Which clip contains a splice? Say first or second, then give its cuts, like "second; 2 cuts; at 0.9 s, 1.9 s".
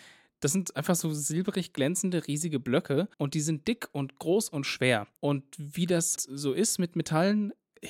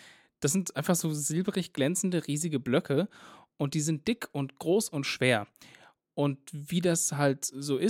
first; 3 cuts; at 3.1 s, 5.2 s, 6.2 s